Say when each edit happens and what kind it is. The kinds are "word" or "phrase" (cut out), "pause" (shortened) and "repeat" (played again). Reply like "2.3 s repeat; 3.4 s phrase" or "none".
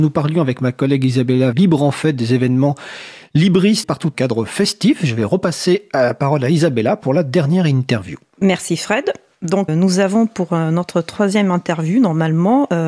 1.5 s phrase; 3.8 s word; 4.1 s phrase; 9.7 s word